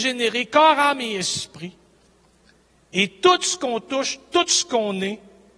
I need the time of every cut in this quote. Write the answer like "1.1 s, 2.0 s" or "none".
none

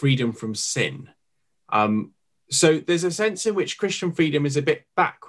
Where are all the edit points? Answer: none

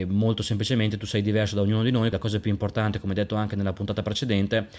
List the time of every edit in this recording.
2.1 s

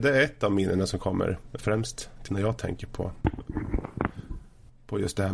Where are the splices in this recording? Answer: 1.6 s, 2.3 s

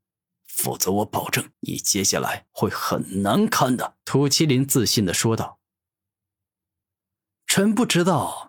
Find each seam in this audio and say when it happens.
1.5 s, 2.5 s, 4.0 s

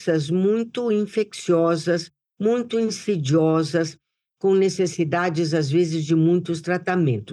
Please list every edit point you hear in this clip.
none

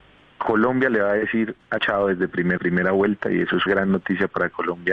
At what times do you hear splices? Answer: 1.8 s, 2.6 s, 3.7 s

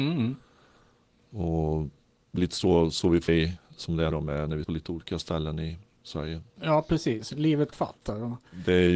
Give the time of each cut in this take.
2.4 s, 3.3 s, 4.1 s, 4.6 s, 7.7 s

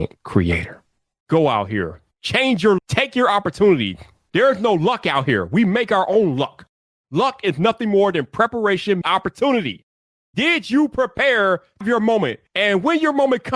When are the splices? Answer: 2.8 s, 9.0 s, 11.8 s

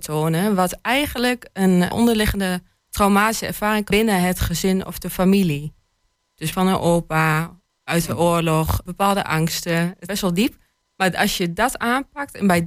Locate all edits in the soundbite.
1.9 s, 3.9 s, 6.5 s, 8.9 s, 10.1 s

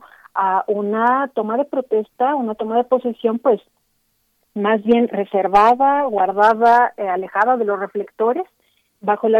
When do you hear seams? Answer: none

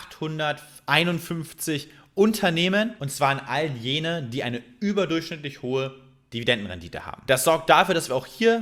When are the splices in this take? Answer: none

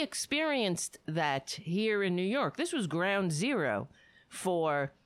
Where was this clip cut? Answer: none

